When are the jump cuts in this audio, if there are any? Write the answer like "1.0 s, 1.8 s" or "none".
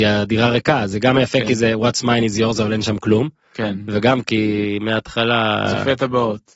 none